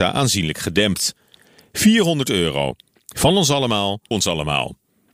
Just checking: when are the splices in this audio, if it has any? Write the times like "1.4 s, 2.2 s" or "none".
4.1 s